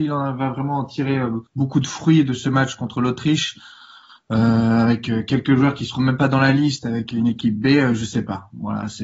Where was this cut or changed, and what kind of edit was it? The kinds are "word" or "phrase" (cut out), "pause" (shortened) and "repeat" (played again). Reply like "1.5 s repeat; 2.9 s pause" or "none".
1.5 s pause